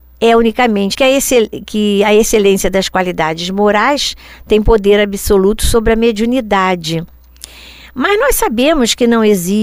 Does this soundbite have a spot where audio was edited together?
yes; 1 cut; at 0.9 s

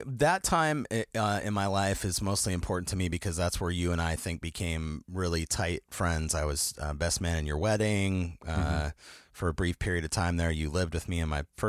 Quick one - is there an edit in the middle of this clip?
no; 0 cuts

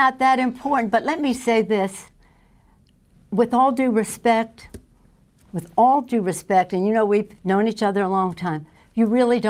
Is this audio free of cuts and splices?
yes; 0 cuts

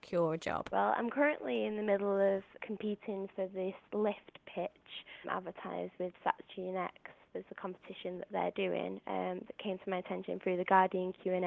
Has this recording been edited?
yes; 1 cut; at 3.8 s

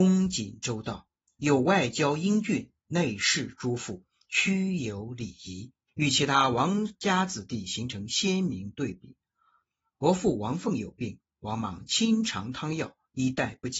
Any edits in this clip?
no; 0 cuts

